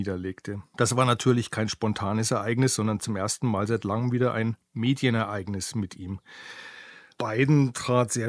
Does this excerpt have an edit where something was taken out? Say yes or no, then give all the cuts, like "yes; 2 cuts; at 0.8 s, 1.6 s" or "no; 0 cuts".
no; 0 cuts